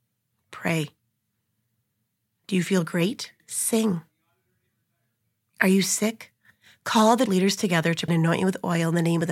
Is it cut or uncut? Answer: cut